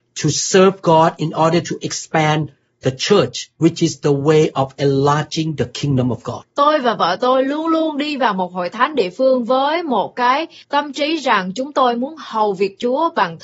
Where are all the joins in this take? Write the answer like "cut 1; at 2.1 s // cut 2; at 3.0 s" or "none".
none